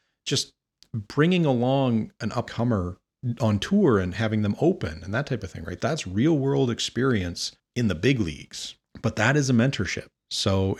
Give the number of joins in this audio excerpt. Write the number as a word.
two